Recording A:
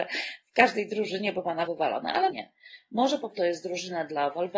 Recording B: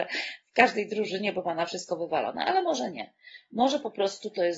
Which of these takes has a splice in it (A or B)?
A